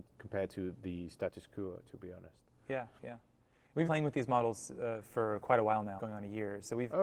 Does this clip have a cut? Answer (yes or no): yes